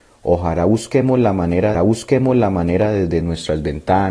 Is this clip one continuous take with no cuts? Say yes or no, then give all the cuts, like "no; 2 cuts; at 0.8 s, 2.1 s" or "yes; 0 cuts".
no; 1 cut; at 1.7 s